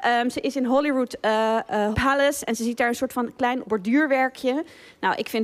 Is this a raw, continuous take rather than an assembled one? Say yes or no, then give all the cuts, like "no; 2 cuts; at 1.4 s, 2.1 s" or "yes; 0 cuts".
no; 2 cuts; at 1.9 s, 3.6 s